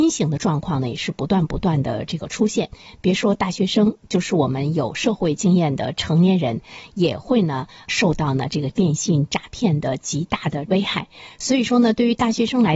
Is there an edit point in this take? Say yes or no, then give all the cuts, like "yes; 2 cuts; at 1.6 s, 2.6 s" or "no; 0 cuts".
no; 0 cuts